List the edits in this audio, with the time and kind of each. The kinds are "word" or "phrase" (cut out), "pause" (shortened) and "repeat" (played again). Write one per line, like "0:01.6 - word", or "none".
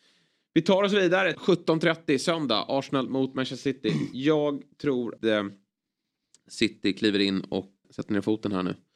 0:01.3 - phrase
0:05.2 - word
0:07.8 - word